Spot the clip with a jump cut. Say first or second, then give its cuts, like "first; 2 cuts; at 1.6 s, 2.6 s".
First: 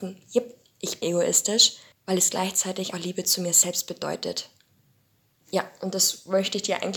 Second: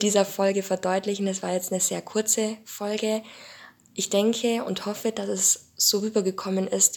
first; 3 cuts; at 1.0 s, 1.9 s, 2.9 s